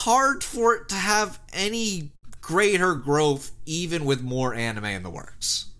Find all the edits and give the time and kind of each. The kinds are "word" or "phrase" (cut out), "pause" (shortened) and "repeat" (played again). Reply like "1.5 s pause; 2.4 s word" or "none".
none